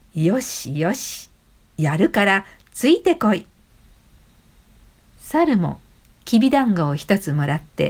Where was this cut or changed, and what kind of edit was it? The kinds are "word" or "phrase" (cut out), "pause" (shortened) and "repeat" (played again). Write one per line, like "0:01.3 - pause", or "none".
none